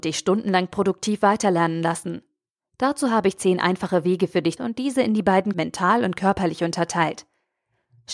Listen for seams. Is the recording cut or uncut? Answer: cut